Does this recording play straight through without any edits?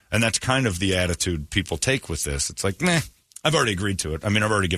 yes; 0 cuts

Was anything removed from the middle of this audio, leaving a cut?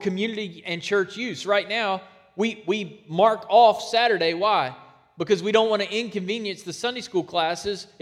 no; 0 cuts

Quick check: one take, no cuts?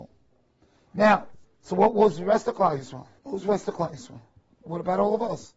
no; 2 cuts; at 1.4 s, 3.2 s

